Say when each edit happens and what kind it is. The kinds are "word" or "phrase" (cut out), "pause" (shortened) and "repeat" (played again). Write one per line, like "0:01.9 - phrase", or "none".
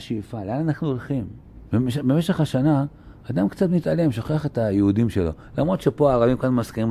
0:01.7 - pause